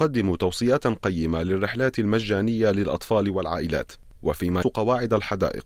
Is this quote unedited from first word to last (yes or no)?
no